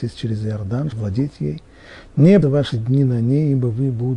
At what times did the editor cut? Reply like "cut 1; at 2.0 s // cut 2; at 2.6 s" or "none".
cut 1; at 0.9 s // cut 2; at 2.4 s